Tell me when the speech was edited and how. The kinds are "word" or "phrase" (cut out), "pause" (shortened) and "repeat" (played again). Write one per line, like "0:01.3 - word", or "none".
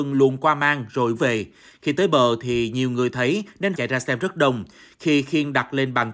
0:01.1 - phrase
0:03.7 - word